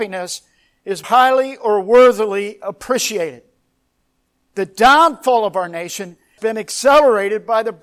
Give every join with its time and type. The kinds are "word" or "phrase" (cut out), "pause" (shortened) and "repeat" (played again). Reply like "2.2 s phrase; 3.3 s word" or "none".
1.0 s word; 6.4 s word